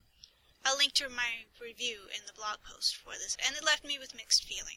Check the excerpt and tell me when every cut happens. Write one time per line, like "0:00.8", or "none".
0:03.4